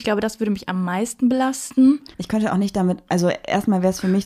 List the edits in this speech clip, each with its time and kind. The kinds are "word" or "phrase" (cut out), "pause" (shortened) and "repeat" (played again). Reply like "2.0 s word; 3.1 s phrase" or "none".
2.1 s pause